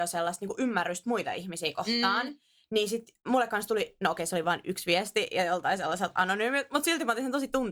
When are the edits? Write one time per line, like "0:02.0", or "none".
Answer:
none